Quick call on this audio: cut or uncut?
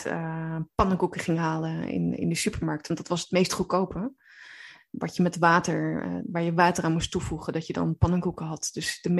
uncut